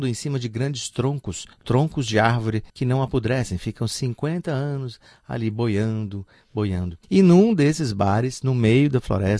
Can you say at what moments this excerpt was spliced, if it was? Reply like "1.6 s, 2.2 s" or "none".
1.5 s, 2.7 s, 7.0 s